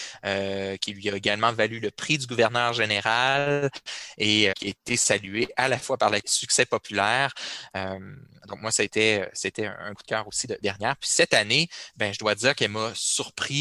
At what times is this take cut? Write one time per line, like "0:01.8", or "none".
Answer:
0:04.5
0:06.2
0:09.9
0:10.6